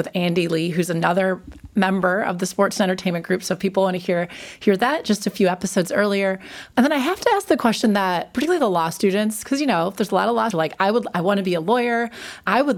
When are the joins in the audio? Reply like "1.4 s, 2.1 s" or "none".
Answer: 10.5 s